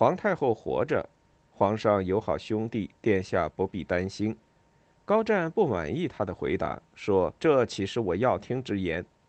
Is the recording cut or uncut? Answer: cut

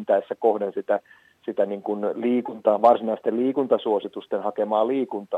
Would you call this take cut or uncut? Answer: uncut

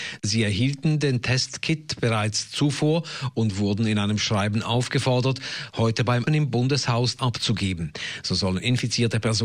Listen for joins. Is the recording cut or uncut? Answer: cut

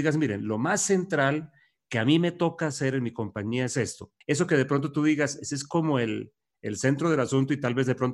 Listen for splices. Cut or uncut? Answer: cut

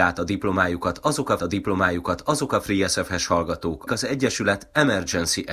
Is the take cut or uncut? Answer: cut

